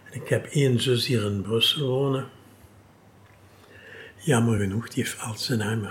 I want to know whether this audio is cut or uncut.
uncut